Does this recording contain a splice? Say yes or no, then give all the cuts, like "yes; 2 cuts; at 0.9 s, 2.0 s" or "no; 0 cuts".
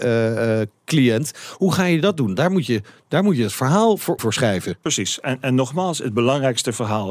yes; 1 cut; at 4.2 s